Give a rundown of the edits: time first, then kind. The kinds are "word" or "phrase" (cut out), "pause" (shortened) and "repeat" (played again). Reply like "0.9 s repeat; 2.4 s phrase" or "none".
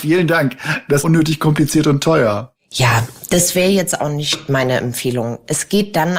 1.0 s phrase